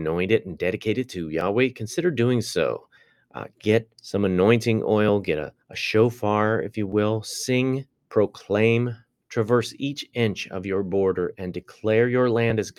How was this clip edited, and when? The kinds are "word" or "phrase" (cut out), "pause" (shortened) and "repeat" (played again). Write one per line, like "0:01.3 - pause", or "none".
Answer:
0:03.0 - pause
0:03.9 - pause
0:05.6 - pause
0:07.9 - pause

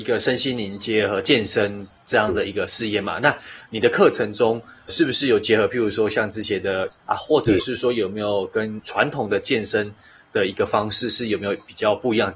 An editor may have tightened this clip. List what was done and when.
0:04.9 - word
0:06.9 - word

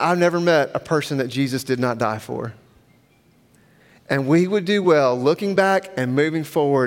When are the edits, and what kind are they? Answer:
none

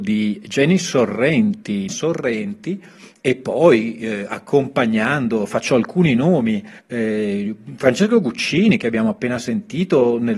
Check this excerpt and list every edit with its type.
0:01.9 - phrase
0:06.8 - pause

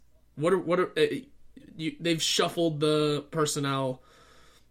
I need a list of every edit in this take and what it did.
none

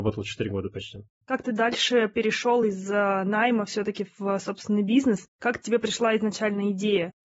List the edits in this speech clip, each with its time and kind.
none

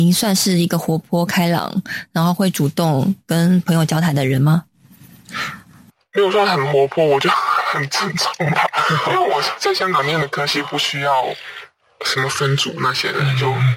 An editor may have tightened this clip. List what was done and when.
none

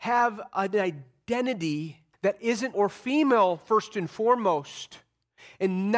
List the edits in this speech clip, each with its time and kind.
0:02.1 - pause
0:02.7 - word

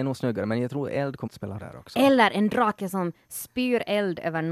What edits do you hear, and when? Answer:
0:01.3 - word
0:01.6 - word

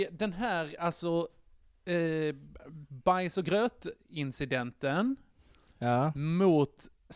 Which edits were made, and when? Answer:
none

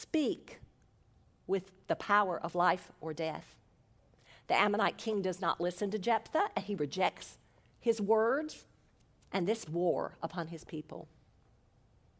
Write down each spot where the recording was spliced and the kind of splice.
0:09.7 - word

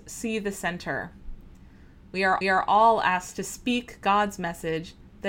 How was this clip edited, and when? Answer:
0:02.4 - repeat

